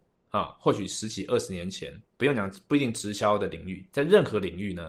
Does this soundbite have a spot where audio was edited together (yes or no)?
yes